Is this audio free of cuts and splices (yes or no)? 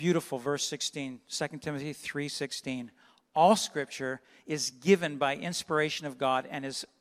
yes